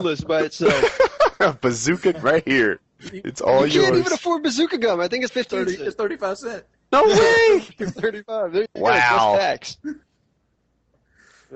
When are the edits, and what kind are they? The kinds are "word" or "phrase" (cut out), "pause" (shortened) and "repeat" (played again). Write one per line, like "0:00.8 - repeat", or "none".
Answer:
0:02.1 - word
0:03.1 - word
0:05.3 - word
0:08.7 - word

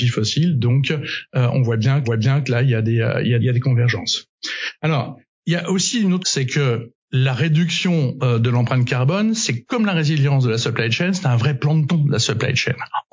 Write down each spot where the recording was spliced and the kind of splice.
0:02.0 - repeat
0:03.4 - word
0:05.3 - pause
0:06.2 - word
0:07.0 - pause
0:11.9 - word

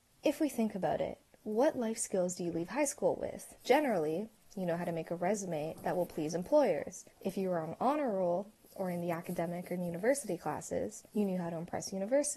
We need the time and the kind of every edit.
0:03.6 - pause
0:07.1 - pause
0:11.1 - pause

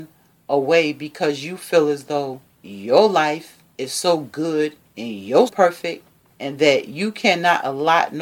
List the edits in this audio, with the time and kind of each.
0:02.5 - pause
0:03.7 - pause
0:04.8 - pause
0:05.5 - word

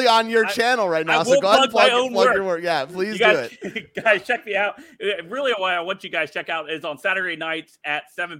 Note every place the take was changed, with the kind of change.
none

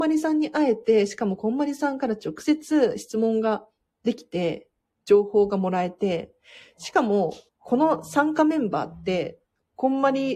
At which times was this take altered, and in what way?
0:04.9 - pause
0:07.5 - pause

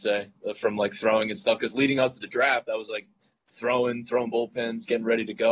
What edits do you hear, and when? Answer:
none

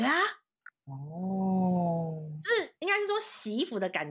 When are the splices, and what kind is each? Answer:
0:02.8 - pause

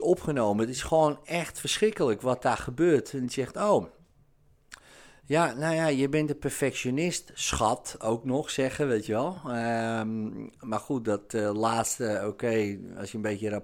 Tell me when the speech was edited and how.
none

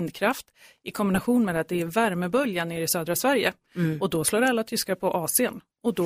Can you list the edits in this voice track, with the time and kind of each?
none

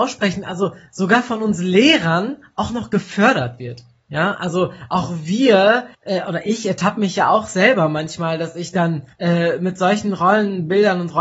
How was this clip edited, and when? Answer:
0:05.9 - pause
0:09.1 - pause

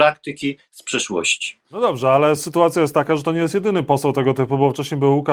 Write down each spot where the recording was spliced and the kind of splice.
none

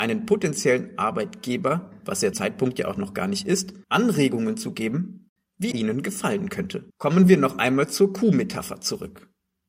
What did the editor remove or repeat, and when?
0:02.3 - phrase
0:03.8 - pause
0:05.7 - word
0:06.9 - pause

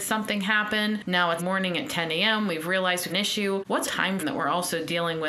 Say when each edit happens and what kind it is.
0:01.4 - word
0:03.1 - word
0:03.9 - word
0:04.2 - word

